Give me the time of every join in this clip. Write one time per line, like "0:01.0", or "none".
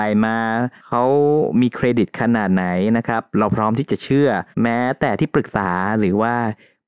0:04.5